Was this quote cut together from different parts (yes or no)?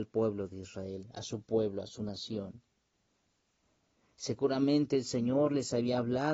no